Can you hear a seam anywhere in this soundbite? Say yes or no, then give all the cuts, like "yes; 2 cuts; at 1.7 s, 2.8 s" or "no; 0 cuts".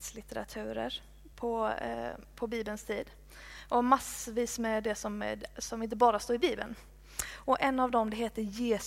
no; 0 cuts